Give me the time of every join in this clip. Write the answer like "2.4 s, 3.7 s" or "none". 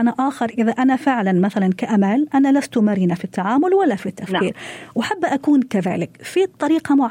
none